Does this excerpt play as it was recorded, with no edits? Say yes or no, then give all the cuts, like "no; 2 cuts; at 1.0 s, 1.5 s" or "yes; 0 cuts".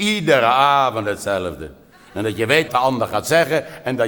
no; 1 cut; at 2.7 s